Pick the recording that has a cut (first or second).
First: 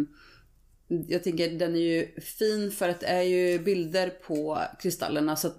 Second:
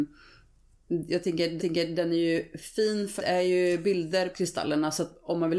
second